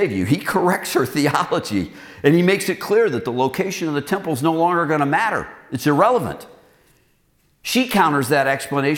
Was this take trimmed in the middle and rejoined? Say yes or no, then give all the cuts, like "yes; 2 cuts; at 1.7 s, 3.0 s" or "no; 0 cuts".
no; 0 cuts